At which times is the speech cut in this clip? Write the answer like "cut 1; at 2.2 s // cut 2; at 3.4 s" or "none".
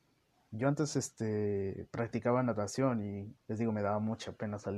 cut 1; at 3.4 s